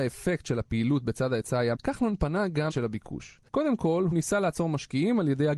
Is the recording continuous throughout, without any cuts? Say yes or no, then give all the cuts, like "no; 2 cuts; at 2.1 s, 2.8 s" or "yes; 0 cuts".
no; 4 cuts; at 1.8 s, 2.7 s, 3.5 s, 4.1 s